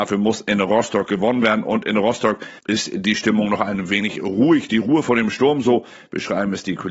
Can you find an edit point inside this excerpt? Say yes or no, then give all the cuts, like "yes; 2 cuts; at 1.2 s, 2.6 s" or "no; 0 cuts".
yes; 1 cut; at 2.6 s